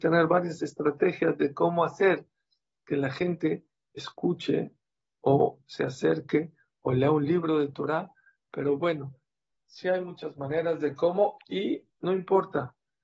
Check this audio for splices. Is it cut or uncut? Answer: uncut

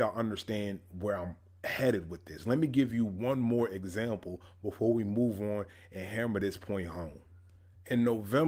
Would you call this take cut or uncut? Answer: uncut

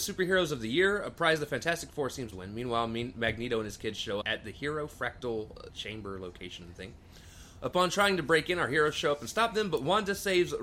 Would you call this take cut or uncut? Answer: cut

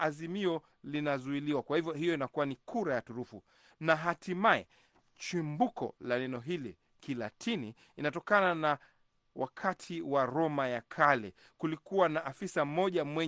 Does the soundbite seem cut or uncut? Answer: uncut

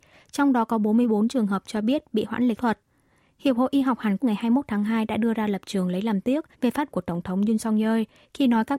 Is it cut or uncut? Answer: cut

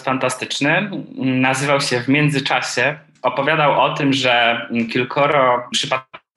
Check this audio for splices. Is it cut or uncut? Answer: uncut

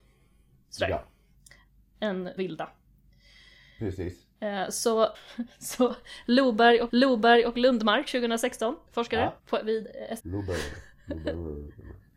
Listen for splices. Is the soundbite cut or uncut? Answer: cut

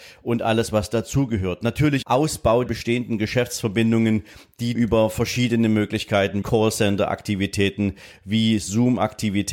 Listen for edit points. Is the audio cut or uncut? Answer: cut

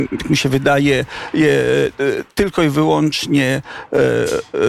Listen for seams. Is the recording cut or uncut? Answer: uncut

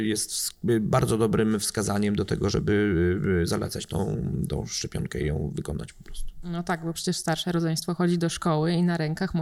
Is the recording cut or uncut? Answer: uncut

